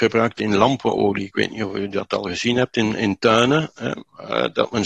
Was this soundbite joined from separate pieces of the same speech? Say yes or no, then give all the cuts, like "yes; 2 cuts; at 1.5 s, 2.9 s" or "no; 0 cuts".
no; 0 cuts